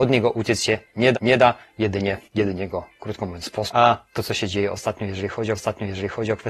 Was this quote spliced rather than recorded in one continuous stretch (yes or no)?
yes